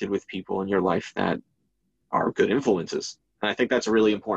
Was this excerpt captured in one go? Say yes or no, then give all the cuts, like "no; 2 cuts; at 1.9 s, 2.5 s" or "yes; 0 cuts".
yes; 0 cuts